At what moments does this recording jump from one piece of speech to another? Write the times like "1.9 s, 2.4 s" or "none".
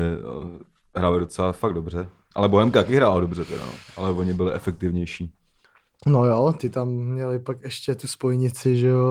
none

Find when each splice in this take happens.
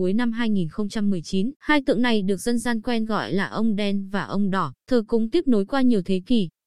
1.6 s, 4.8 s

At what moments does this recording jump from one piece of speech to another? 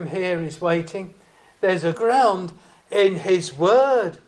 1.9 s

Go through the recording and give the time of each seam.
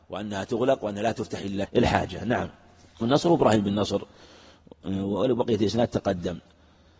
1.6 s, 3.0 s

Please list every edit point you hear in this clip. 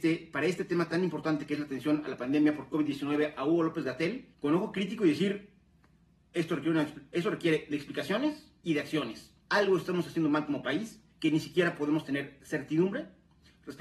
4.3 s, 8.6 s, 9.4 s, 11.1 s

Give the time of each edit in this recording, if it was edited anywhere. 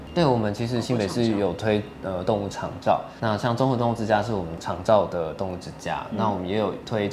3.2 s

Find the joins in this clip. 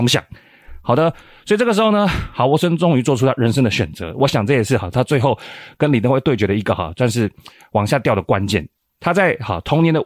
none

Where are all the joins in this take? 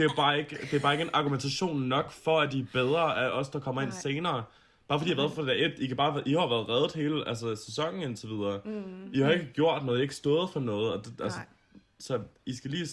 none

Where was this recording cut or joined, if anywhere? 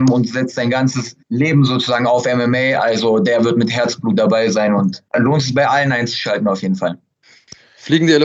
1.2 s, 5.1 s

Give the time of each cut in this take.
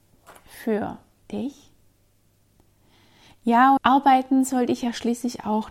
3.8 s

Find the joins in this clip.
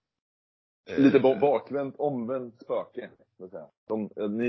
2.6 s

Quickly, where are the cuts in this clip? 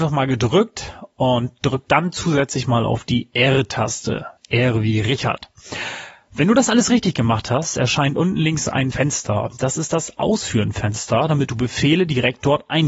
4.4 s, 8.9 s

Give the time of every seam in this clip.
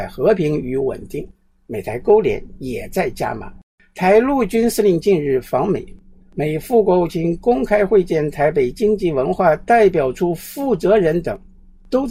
none

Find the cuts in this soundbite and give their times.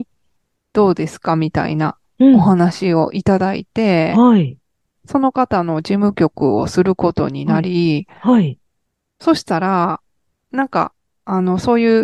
5.0 s

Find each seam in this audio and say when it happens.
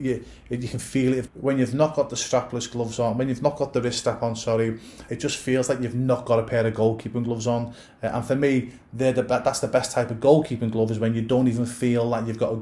1.3 s, 5.1 s

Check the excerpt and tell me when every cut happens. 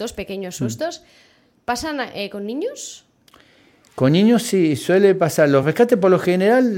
none

